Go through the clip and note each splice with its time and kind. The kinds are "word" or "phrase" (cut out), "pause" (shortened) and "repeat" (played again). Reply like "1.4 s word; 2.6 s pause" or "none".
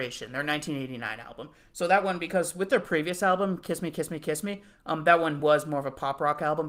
none